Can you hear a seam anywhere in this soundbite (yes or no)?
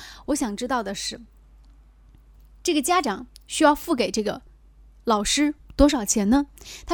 no